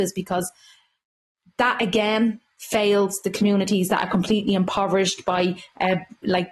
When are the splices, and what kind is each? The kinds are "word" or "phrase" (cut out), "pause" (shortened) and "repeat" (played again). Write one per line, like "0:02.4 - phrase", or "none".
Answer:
none